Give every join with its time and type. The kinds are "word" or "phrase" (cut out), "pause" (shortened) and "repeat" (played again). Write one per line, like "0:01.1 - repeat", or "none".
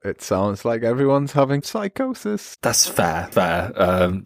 0:01.6 - word
0:03.3 - word